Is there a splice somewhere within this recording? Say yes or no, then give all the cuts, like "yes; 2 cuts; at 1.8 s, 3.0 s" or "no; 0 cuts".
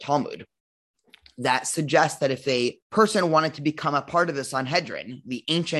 yes; 1 cut; at 2.8 s